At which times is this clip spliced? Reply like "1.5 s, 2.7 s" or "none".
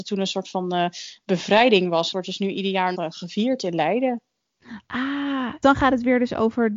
2.1 s, 2.9 s, 5.6 s